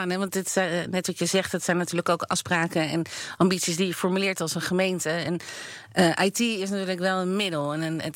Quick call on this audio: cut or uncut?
uncut